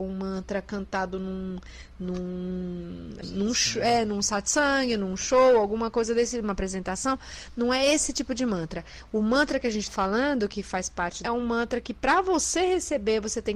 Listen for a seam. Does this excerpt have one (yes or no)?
yes